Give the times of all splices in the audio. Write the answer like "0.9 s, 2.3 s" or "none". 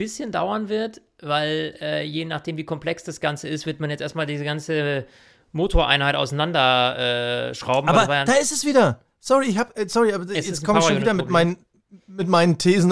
none